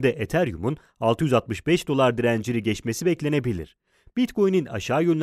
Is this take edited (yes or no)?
no